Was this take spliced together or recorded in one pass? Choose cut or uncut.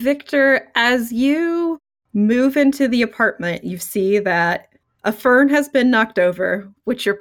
uncut